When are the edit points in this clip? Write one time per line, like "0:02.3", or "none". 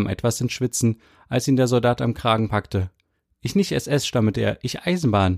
none

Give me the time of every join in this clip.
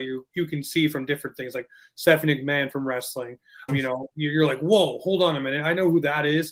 0:03.7

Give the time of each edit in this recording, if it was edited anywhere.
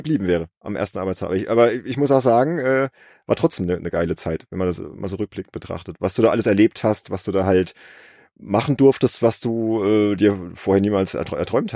none

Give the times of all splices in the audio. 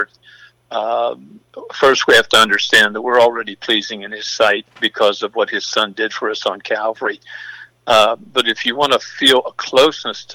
none

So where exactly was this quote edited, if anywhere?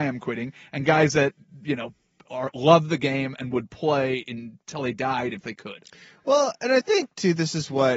none

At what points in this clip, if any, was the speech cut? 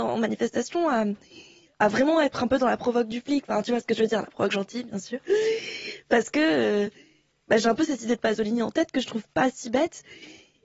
none

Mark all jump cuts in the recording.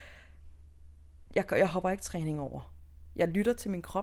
0:01.3

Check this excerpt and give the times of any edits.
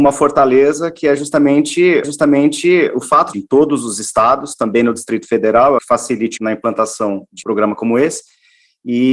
0:02.0
0:03.3
0:05.8
0:06.4
0:07.4

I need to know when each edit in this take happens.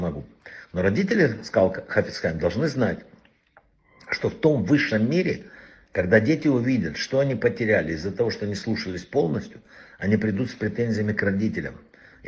none

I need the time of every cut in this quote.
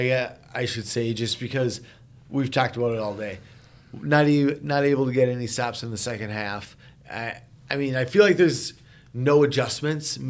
none

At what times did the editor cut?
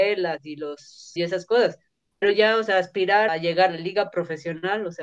0:01.2
0:02.2
0:03.3
0:03.7

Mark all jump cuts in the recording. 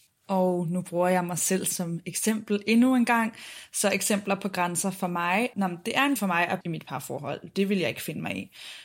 0:05.5
0:06.2
0:06.6

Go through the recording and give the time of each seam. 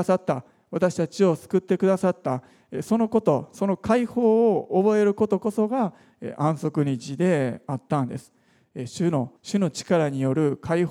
0:09.4

